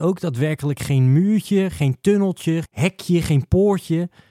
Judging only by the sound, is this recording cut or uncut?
cut